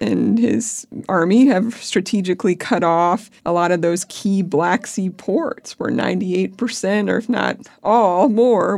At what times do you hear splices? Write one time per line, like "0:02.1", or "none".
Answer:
0:03.4